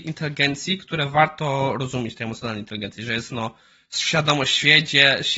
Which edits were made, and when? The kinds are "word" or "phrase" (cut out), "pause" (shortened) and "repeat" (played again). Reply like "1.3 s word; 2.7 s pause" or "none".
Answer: none